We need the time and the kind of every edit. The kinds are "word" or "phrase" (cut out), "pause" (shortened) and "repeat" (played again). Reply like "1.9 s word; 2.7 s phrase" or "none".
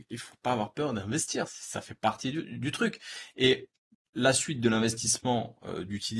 3.9 s pause